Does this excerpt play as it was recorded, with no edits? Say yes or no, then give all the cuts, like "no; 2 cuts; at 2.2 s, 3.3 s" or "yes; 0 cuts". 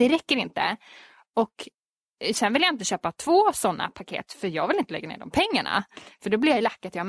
yes; 0 cuts